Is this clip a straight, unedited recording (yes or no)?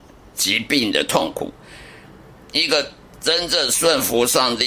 yes